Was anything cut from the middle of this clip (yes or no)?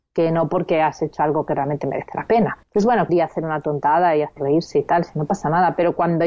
yes